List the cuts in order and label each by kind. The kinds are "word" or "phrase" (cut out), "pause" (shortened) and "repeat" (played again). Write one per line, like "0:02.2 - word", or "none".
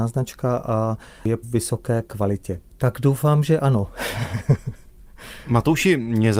0:01.4 - phrase
0:02.7 - pause